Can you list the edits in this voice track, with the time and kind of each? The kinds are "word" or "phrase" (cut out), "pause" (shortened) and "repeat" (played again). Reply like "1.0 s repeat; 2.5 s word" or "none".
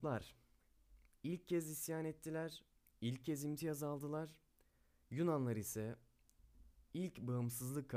none